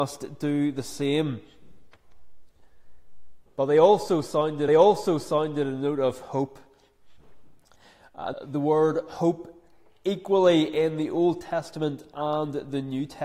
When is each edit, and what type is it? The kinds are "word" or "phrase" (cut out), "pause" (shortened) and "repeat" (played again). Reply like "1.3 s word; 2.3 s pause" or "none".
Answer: 3.5 s pause; 4.7 s repeat; 8.3 s phrase